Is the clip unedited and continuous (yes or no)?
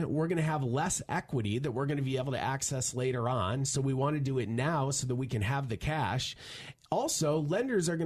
yes